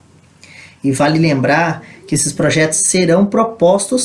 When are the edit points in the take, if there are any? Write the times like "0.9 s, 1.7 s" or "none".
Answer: none